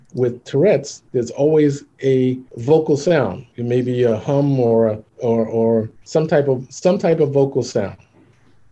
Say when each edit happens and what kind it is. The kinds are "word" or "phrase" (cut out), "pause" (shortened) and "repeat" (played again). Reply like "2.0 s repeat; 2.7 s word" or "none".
1.1 s pause; 2.5 s pause; 3.5 s pause; 5.1 s pause; 6.0 s pause